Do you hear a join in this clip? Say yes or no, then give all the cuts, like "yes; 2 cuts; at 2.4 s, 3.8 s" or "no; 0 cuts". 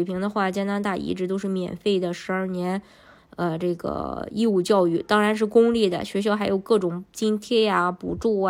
no; 0 cuts